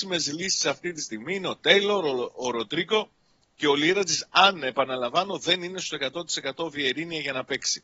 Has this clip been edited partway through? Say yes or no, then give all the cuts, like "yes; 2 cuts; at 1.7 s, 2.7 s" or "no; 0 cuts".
no; 0 cuts